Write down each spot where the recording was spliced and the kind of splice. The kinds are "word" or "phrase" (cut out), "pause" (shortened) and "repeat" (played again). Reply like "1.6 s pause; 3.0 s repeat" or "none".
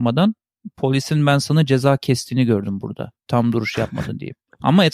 none